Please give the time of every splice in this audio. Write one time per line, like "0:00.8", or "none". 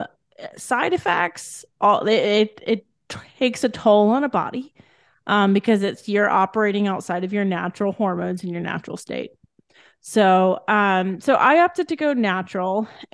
none